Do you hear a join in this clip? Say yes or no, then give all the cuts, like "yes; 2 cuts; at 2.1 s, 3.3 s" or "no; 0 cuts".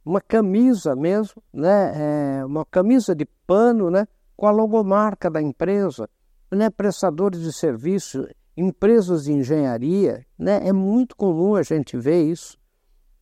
yes; 2 cuts; at 1.5 s, 2.7 s